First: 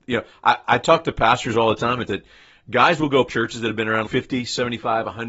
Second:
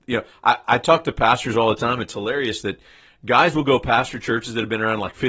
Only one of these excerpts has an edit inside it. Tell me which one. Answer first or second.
first